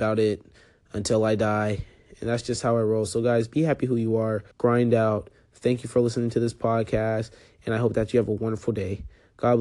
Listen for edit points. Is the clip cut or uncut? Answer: cut